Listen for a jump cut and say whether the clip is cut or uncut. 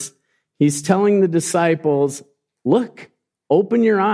uncut